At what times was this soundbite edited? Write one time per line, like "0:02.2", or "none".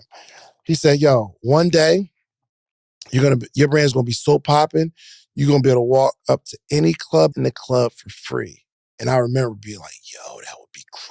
0:07.3